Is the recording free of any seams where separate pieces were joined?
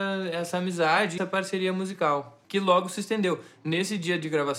no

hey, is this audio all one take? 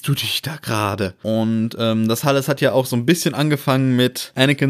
yes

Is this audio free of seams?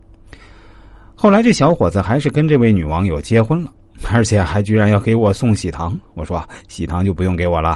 no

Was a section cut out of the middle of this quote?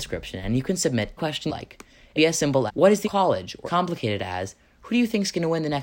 yes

